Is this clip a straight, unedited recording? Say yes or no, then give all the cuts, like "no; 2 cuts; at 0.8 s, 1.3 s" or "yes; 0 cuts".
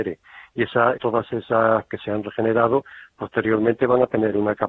no; 2 cuts; at 0.9 s, 1.9 s